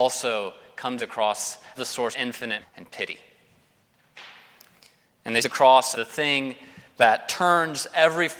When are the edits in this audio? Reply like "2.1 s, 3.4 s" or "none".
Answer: 1.0 s, 1.7 s, 2.1 s, 2.6 s, 5.4 s, 5.9 s